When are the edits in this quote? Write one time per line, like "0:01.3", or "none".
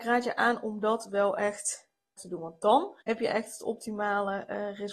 0:02.2
0:03.0